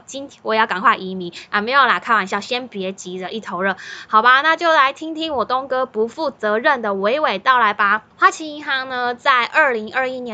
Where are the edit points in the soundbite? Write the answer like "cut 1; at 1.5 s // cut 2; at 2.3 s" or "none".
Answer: cut 1; at 8.1 s